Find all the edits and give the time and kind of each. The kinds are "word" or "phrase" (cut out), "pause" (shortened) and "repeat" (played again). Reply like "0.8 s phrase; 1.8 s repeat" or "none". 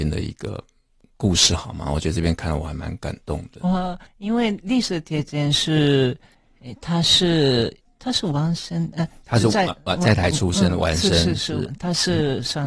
4.1 s pause; 7.8 s pause